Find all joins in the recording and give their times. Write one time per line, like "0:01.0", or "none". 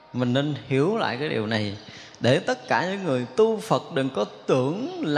none